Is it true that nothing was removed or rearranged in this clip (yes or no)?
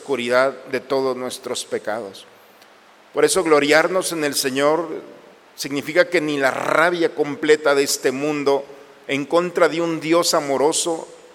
yes